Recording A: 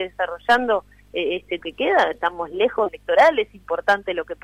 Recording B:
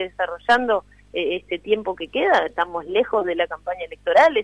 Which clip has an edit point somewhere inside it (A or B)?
A